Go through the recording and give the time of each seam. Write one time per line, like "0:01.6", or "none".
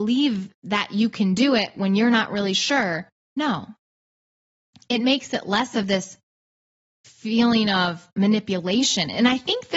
none